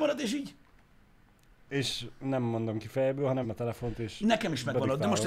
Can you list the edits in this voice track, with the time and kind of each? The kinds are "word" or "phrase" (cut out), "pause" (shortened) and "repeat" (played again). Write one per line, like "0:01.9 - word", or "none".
0:03.4 - word